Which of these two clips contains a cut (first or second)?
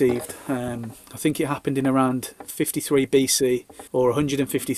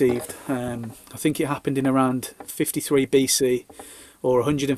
first